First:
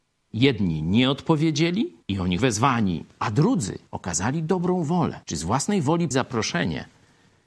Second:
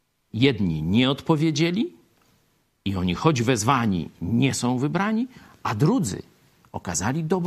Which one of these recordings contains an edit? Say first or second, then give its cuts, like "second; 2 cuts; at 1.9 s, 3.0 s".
first; 6 cuts; at 2.0 s, 2.4 s, 3.1 s, 3.9 s, 5.2 s, 6.1 s